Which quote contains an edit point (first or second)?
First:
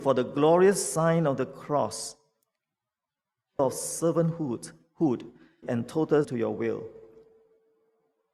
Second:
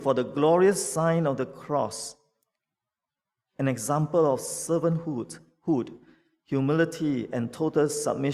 first